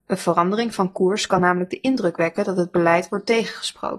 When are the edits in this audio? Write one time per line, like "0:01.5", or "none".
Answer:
none